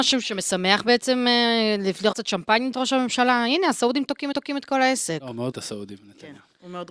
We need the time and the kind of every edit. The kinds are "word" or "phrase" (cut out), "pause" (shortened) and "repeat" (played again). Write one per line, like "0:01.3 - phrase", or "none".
0:02.1 - word
0:02.7 - word
0:04.3 - repeat
0:05.5 - word